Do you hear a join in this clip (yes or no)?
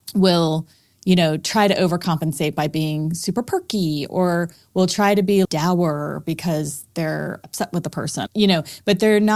yes